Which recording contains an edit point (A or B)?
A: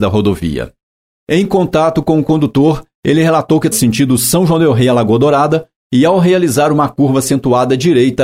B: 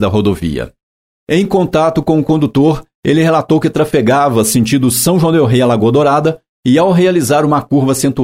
A